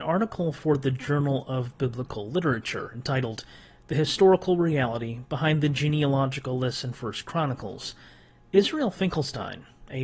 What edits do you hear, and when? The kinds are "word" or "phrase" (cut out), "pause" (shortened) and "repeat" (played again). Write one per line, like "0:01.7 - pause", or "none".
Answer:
none

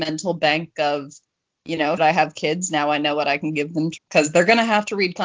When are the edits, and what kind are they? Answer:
0:02.0 - word
0:04.0 - word

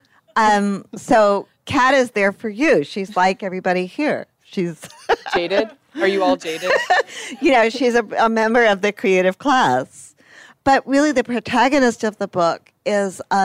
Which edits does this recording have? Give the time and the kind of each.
none

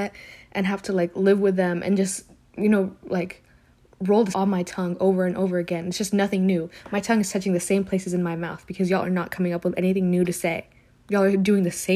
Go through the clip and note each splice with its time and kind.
0:04.3 - word

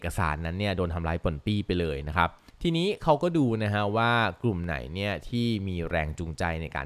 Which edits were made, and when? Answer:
0:02.5 - pause

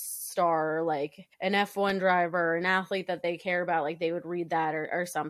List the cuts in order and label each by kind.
0:01.3 - pause

